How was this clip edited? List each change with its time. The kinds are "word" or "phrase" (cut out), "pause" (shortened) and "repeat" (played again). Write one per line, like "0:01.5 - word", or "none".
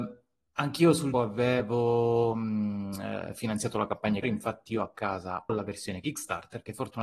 0:01.1 - word
0:04.2 - word
0:05.5 - word